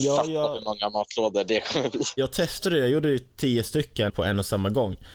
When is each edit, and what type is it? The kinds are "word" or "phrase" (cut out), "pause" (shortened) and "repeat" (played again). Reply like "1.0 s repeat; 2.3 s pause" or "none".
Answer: 4.1 s word